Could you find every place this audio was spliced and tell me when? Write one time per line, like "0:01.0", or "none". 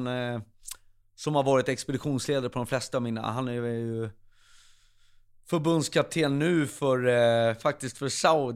none